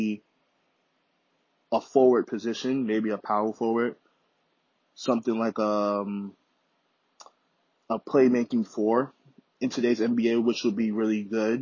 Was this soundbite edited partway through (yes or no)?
no